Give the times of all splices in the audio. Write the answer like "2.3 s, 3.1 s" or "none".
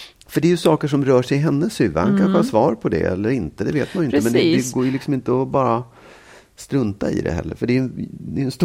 none